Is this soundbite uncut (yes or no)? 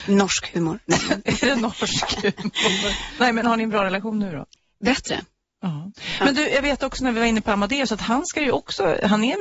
yes